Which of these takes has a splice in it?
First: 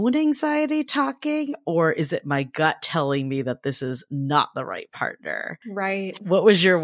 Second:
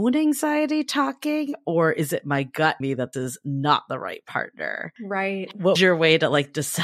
second; 3 cuts; at 2.8 s, 3.1 s, 5.8 s

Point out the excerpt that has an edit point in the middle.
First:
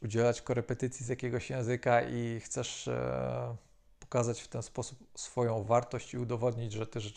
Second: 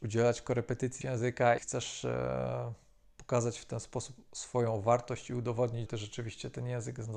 second; 3 cuts; at 1.0 s, 1.6 s, 5.9 s

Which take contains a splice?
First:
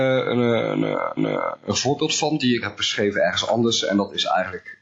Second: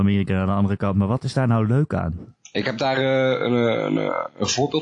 first; 2 cuts; at 1.2 s, 2.6 s

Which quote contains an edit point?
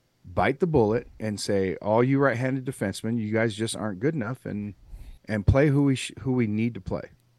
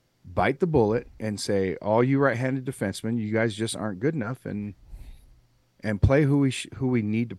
first; 1 cut; at 5.2 s

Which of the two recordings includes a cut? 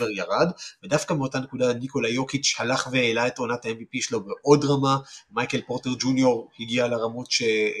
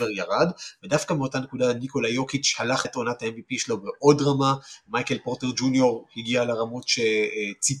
second; 1 cut; at 2.8 s

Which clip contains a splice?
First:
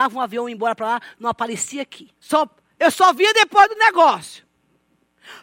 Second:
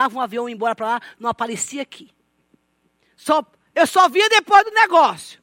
first; 1 cut; at 2.2 s

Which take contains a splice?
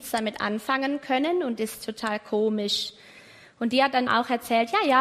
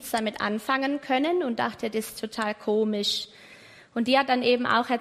first; 2 cuts; at 1.6 s, 4.1 s

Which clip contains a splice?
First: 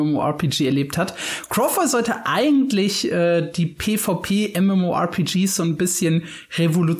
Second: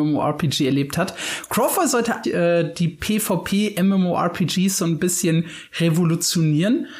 second; 1 cut; at 2.2 s

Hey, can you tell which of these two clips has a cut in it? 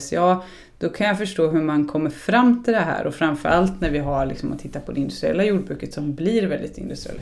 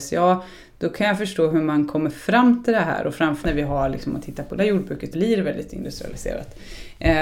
second; 3 cuts; at 3.4 s, 4.6 s, 5.1 s

